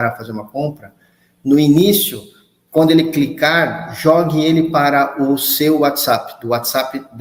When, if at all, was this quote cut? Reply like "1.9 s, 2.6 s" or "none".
none